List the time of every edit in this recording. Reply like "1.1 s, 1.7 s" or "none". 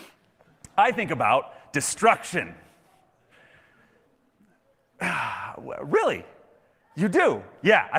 none